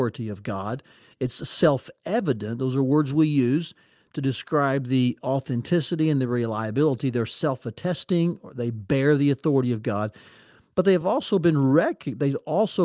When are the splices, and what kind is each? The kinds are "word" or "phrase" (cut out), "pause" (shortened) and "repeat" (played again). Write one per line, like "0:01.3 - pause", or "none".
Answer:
none